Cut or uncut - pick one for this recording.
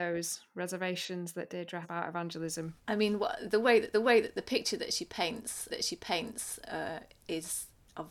cut